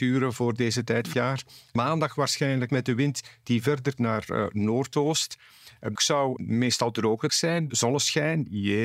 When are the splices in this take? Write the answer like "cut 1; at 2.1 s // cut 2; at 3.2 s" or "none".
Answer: cut 1; at 1.1 s // cut 2; at 1.8 s // cut 3; at 2.7 s // cut 4; at 4.0 s // cut 5; at 6.0 s // cut 6; at 6.4 s // cut 7; at 7.3 s // cut 8; at 7.7 s